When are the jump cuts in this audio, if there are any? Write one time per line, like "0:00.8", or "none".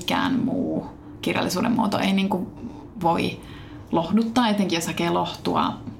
none